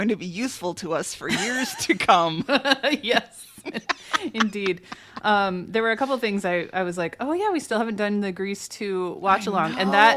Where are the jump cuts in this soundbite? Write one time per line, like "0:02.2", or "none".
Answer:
none

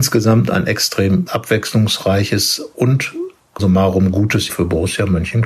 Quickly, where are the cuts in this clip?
0:01.3
0:03.6
0:04.5

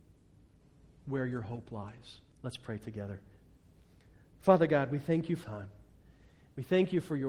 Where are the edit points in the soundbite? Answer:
0:02.3
0:05.4

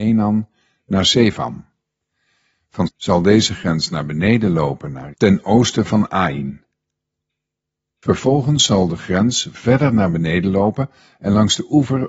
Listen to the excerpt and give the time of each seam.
0:02.9
0:05.1

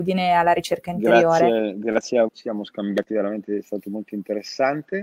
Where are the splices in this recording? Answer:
0:02.3

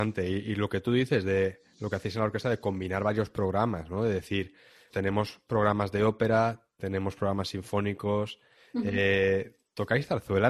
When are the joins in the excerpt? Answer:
0:04.9

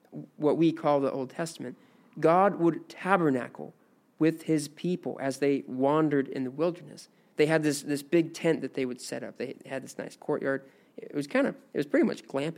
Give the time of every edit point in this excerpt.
none

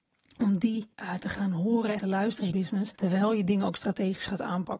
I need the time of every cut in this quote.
0:00.9
0:02.0
0:02.5
0:02.9

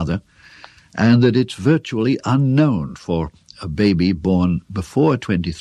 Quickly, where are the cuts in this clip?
none

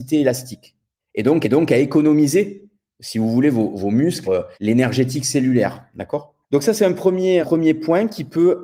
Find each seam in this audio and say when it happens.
0:01.0
0:01.4
0:03.7
0:04.2
0:04.5
0:06.4
0:07.4

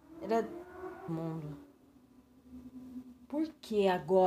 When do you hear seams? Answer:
0:01.1

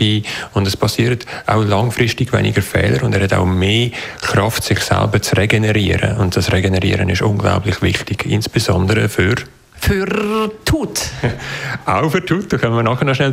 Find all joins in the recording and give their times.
none

